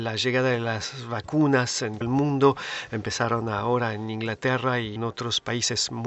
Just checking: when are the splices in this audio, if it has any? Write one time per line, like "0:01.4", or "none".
0:02.0
0:05.0

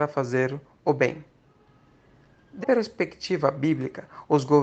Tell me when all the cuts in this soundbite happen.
0:02.6

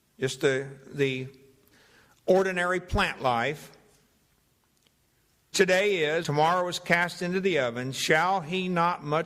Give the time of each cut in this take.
0:05.5
0:06.2

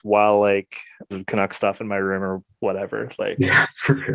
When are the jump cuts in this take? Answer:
0:01.1

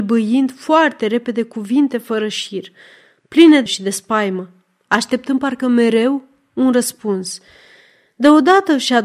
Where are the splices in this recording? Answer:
0:03.7

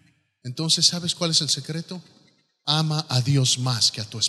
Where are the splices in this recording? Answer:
none

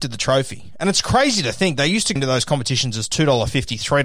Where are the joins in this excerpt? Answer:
0:02.2

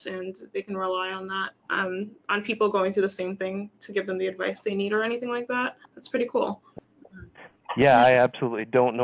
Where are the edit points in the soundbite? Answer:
0:01.6
0:05.8

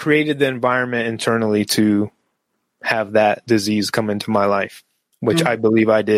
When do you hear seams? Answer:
none

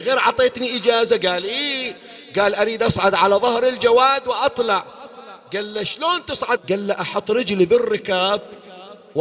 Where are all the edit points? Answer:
0:06.6

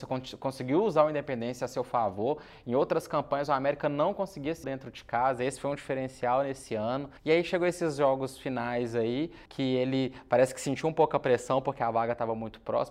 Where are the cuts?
0:04.6
0:07.2
0:09.5

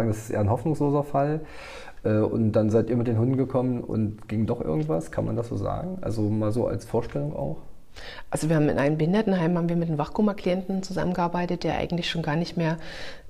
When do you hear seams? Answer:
none

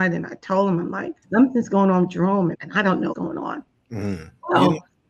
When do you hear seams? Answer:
0:01.2
0:02.5
0:03.1
0:03.7

